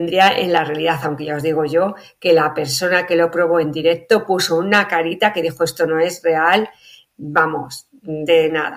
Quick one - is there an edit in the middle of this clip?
no; 0 cuts

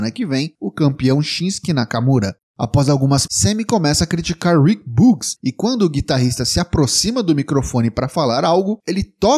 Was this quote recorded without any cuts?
no; 1 cut; at 3.3 s

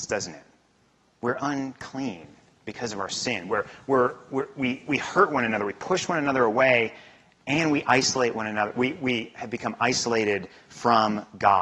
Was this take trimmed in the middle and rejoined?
no; 0 cuts

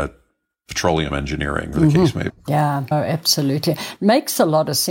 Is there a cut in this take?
yes; 3 cuts; at 1.7 s, 2.3 s, 2.9 s

